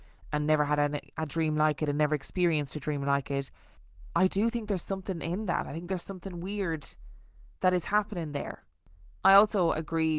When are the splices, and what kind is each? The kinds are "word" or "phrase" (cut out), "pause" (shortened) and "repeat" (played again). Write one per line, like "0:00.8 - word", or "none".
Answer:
0:07.6 - pause